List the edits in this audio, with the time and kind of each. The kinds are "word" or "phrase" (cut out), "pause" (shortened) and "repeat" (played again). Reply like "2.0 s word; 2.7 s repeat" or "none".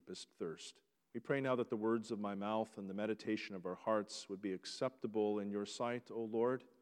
0.9 s pause